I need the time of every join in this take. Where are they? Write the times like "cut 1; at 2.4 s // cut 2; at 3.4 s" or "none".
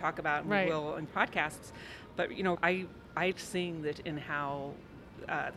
cut 1; at 1.1 s // cut 2; at 2.6 s // cut 3; at 3.3 s // cut 4; at 3.9 s